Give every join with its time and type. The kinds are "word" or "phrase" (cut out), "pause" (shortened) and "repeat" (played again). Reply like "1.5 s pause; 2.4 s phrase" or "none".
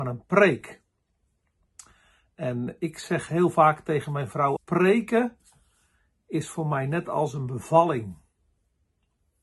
4.6 s word